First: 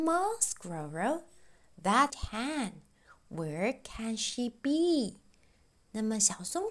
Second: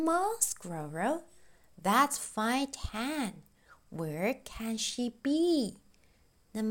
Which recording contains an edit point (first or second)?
first